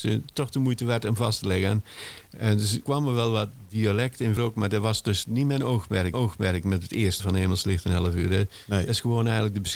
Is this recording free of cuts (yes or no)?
no